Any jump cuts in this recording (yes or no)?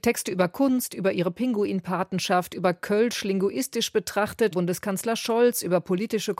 yes